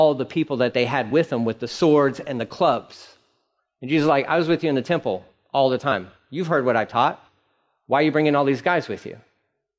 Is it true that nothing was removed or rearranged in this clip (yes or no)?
yes